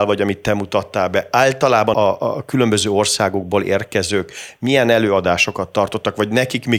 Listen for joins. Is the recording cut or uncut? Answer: cut